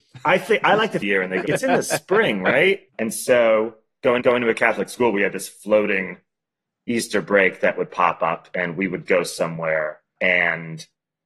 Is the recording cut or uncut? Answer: cut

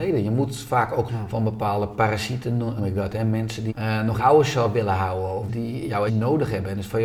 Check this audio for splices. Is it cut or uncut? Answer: cut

